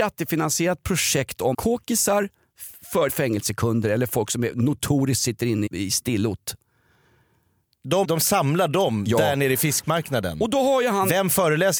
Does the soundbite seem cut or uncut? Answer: cut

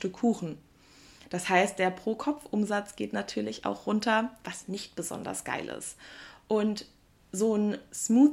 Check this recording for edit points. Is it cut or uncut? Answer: uncut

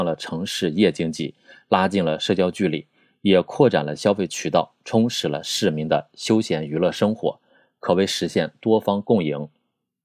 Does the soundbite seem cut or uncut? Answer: uncut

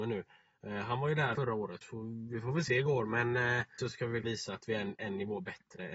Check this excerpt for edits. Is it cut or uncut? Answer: cut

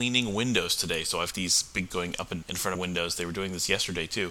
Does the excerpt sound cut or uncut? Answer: cut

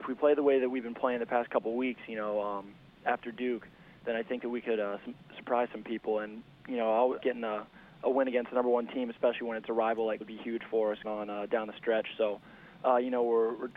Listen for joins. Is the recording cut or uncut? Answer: cut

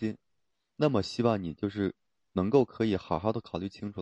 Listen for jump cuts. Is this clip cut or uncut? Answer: uncut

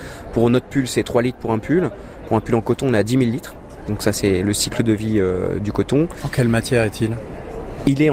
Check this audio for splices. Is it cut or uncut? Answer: uncut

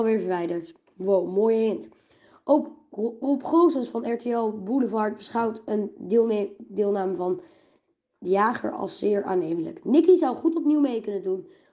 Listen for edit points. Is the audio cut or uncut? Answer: cut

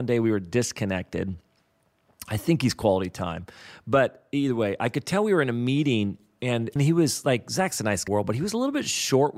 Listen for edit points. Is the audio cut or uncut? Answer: cut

